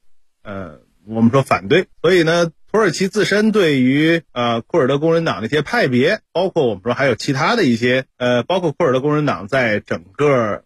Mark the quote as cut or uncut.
cut